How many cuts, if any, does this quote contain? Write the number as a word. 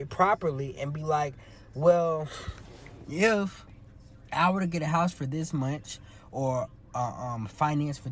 one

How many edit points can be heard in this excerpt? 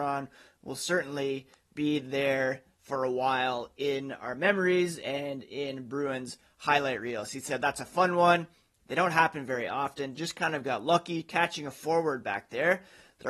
zero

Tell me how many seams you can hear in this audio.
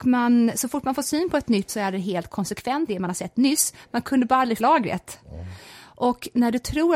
three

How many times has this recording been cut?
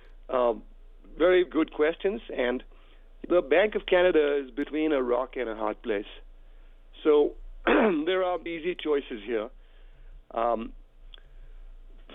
three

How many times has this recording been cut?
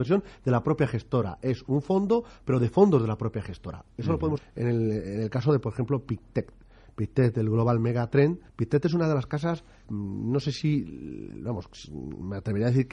three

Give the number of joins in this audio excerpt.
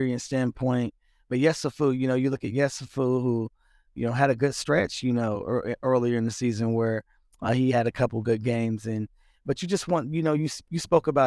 zero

